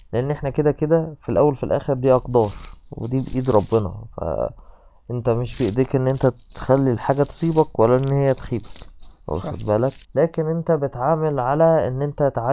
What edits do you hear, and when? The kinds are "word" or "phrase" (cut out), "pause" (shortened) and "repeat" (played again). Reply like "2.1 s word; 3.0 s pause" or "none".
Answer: 9.2 s pause; 10.0 s pause